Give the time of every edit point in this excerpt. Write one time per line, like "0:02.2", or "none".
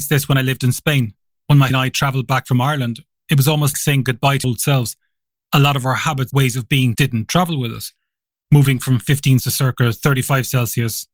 0:01.7
0:03.7
0:04.4
0:06.3
0:06.9
0:09.4